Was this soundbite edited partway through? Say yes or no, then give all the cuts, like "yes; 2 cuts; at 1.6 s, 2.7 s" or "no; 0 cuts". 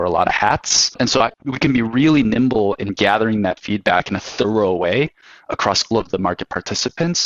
yes; 1 cut; at 5.9 s